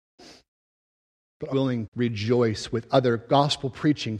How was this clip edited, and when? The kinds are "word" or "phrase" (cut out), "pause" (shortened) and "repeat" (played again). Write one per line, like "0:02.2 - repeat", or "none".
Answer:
0:01.5 - word
0:01.9 - word